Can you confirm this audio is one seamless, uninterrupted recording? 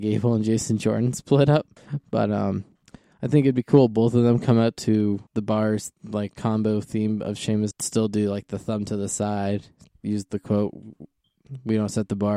no; 5 cuts; at 1.8 s, 2.8 s, 5.3 s, 6.0 s, 7.7 s

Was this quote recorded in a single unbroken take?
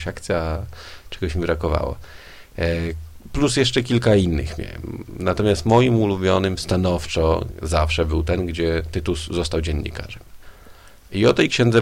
yes; 0 cuts

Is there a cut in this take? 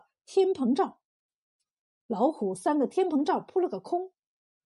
no; 0 cuts

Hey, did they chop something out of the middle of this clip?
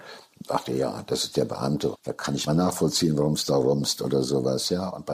yes; 2 cuts; at 1.9 s, 2.5 s

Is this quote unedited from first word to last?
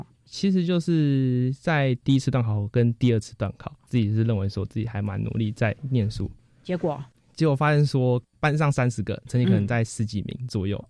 yes; 0 cuts

